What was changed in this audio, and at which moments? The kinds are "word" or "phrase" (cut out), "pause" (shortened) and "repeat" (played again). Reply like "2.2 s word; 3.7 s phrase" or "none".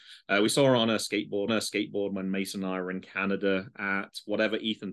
1.5 s repeat